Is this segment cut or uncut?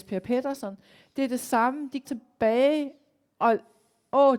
cut